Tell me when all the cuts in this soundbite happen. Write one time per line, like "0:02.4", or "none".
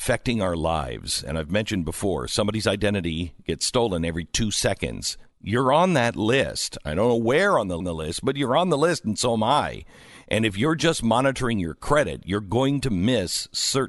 0:07.8